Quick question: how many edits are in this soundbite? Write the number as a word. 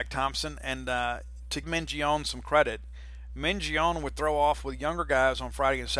one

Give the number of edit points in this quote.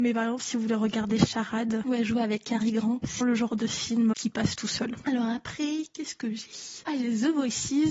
two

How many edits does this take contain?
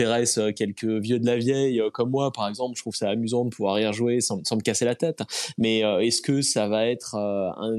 zero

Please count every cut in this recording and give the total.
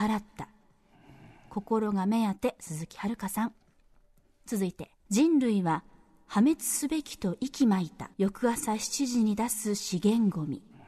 two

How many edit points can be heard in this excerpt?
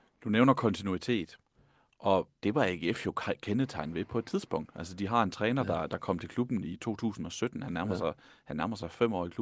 one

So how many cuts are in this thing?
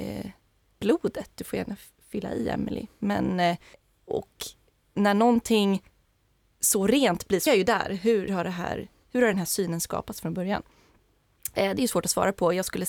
three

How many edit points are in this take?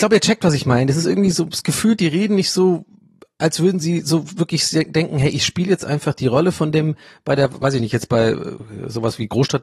zero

